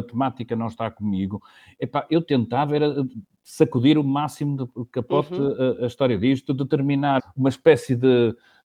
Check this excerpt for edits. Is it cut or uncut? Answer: cut